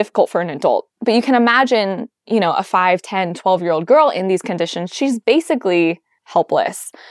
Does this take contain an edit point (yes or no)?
no